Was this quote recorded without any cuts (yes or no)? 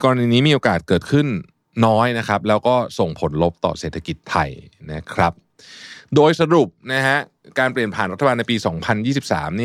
yes